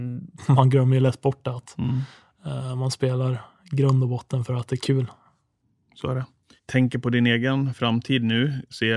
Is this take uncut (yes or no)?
yes